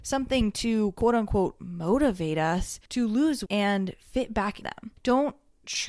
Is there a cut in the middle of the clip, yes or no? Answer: yes